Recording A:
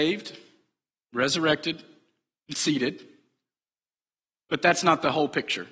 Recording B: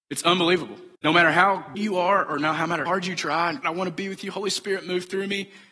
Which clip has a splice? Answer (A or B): B